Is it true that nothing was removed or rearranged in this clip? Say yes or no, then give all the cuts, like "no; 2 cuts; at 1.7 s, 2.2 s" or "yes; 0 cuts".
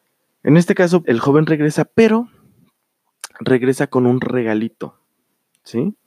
no; 1 cut; at 1.0 s